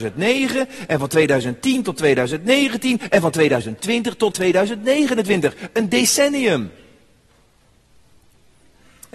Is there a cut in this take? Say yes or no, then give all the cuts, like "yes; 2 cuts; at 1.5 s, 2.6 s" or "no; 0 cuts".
yes; 1 cut; at 4.3 s